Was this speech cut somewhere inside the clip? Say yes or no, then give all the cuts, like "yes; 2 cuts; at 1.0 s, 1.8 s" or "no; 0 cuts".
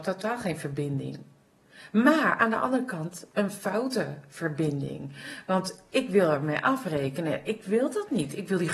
no; 0 cuts